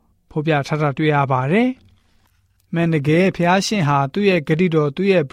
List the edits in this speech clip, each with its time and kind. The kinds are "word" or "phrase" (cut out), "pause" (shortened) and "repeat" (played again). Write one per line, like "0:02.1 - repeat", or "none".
none